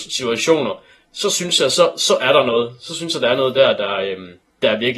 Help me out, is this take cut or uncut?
uncut